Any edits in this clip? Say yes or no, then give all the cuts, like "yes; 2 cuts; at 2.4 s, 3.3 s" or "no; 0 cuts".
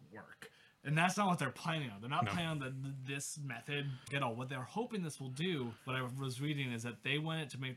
yes; 2 cuts; at 4.1 s, 5.8 s